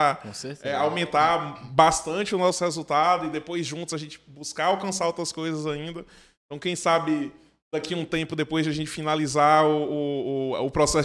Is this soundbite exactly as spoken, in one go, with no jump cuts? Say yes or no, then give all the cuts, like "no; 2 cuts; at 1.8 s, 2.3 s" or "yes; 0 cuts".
yes; 0 cuts